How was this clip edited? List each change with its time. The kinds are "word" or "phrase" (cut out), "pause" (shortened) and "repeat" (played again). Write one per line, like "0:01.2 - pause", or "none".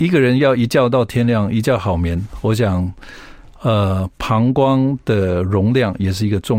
none

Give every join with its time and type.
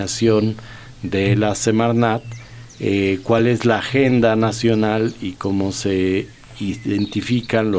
none

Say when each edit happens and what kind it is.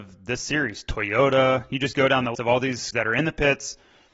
0:02.3 - word
0:02.9 - word

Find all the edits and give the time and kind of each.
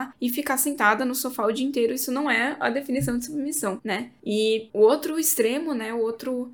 none

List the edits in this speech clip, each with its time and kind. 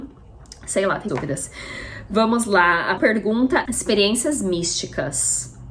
0:01.1 - word
0:03.0 - word
0:03.7 - word

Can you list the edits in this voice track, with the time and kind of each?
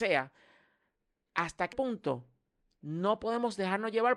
0:01.7 - phrase

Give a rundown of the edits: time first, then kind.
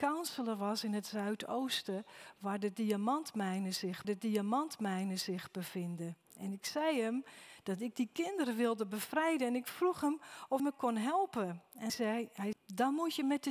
0:04.0 - repeat
0:10.6 - word
0:11.9 - word
0:12.5 - word

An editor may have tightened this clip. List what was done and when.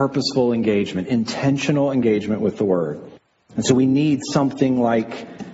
none

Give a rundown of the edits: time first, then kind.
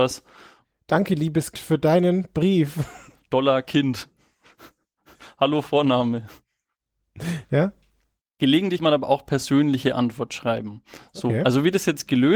0:01.5 - word
0:08.8 - word

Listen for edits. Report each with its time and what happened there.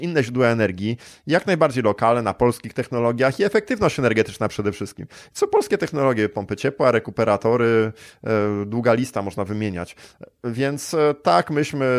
none

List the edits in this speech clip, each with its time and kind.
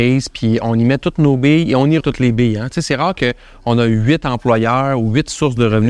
0:02.0 - word

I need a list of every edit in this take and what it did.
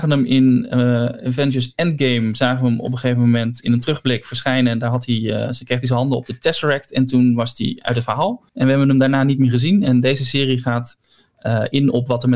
0:08.5 - pause

